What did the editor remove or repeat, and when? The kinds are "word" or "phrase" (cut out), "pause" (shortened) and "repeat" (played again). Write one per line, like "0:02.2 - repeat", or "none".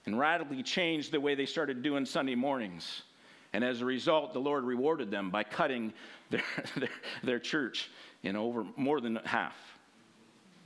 none